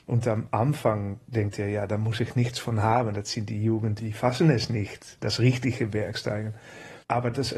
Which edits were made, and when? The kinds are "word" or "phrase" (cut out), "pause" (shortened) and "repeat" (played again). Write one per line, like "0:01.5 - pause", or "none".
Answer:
none